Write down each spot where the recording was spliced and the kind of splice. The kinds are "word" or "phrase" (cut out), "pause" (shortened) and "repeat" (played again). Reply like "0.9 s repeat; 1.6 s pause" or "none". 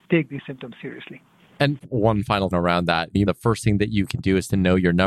1.8 s word; 2.5 s word; 3.3 s word